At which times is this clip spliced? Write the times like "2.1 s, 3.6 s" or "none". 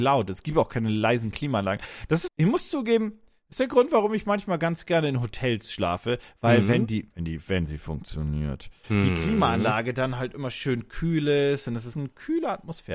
2.3 s, 11.9 s